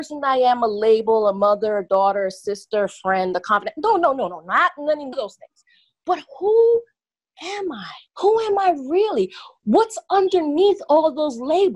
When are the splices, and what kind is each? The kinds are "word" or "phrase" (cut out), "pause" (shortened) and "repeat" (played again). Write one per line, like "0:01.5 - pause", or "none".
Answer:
0:05.1 - word
0:08.1 - pause